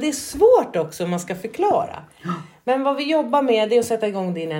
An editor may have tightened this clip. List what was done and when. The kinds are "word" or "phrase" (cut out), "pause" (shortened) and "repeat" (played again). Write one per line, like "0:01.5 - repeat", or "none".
none